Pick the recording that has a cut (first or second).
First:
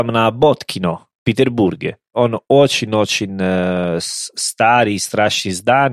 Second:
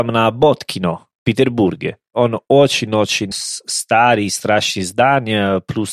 second